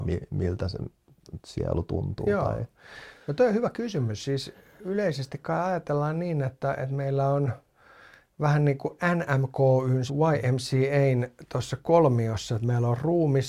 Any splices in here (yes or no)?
yes